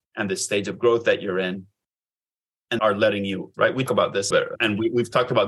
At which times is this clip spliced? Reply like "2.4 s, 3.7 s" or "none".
2.8 s, 3.5 s, 3.9 s, 4.3 s